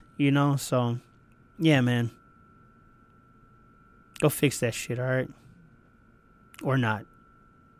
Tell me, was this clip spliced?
no; 0 cuts

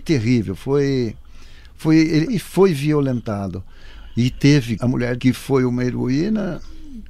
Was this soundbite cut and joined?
yes; 3 cuts; at 2.3 s, 4.8 s, 5.2 s

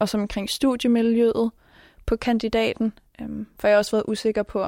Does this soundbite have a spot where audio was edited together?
no; 0 cuts

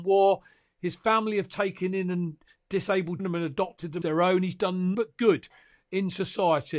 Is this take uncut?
no; 3 cuts; at 3.2 s, 4.0 s, 4.9 s

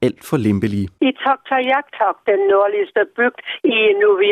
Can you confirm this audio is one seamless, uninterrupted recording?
no; 1 cut; at 1.0 s

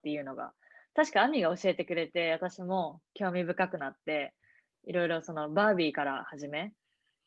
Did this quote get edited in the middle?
no; 0 cuts

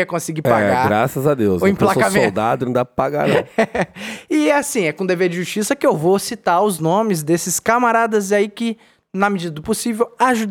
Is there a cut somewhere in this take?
no; 0 cuts

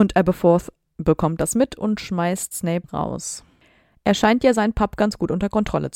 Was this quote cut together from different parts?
yes; 1 cut; at 2.8 s

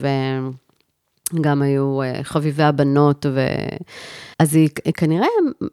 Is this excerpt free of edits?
no; 1 cut; at 4.3 s

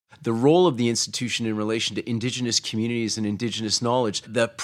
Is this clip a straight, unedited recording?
yes; 0 cuts

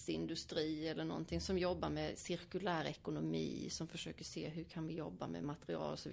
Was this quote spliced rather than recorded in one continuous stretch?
no; 0 cuts

